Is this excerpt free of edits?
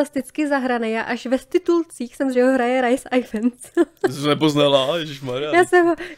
no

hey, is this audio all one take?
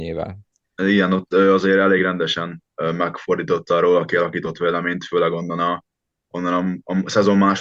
yes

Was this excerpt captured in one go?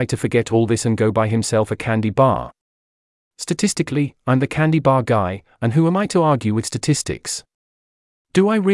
yes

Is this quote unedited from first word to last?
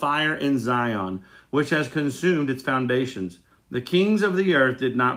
yes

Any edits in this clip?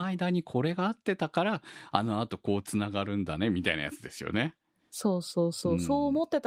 no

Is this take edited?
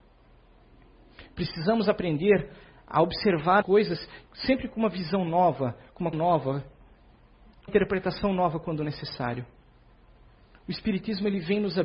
yes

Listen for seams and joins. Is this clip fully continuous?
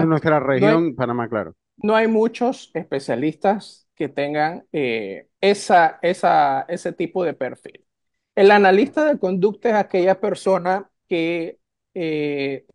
no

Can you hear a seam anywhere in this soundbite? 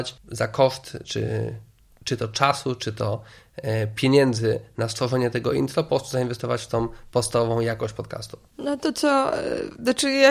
no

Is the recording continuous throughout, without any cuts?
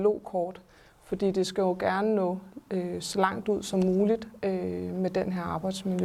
yes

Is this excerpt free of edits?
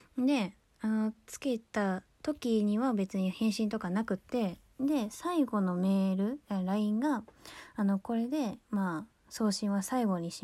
no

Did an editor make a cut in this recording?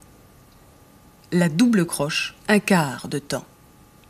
yes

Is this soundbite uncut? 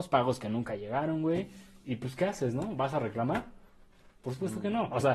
yes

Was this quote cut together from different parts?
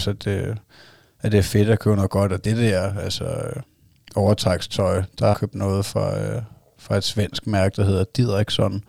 yes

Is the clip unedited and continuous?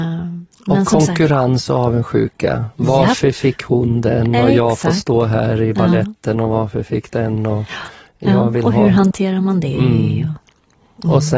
yes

